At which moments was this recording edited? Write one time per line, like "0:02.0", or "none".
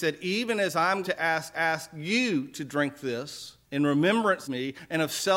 0:01.0
0:01.5
0:03.6
0:04.4